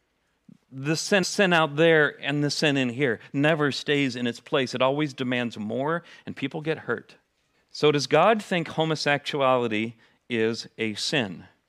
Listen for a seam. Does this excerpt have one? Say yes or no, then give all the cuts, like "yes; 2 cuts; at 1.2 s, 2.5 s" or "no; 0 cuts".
yes; 2 cuts; at 1.2 s, 7.5 s